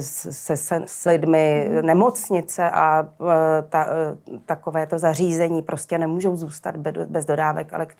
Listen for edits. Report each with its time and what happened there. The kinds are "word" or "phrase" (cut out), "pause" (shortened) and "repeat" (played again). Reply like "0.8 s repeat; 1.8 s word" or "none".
1.1 s word